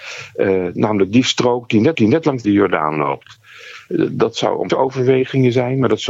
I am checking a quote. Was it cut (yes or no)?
yes